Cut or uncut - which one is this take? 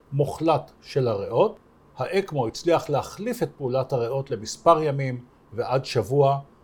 uncut